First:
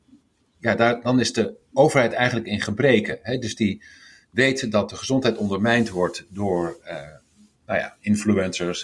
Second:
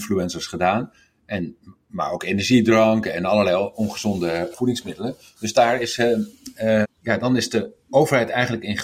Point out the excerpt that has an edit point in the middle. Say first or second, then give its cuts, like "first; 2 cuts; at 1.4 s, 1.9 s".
second; 3 cuts; at 4.5 s, 6.8 s, 7.2 s